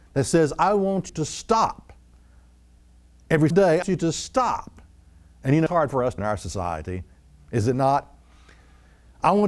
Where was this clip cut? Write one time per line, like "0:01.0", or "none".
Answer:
0:01.1
0:03.5
0:03.8
0:05.7
0:06.2